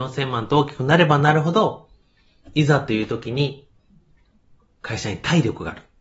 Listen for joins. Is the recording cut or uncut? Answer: uncut